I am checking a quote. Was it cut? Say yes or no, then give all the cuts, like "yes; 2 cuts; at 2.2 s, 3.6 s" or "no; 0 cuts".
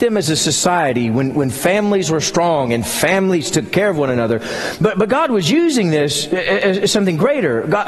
no; 0 cuts